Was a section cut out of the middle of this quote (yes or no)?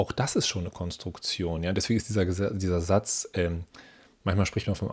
no